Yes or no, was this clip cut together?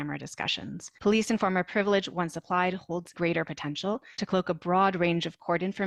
yes